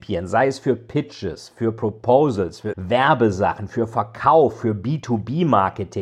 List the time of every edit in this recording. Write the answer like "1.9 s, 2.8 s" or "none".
2.7 s